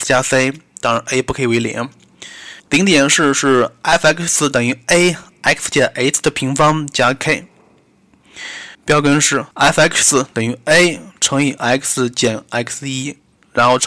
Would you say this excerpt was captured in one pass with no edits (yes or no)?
no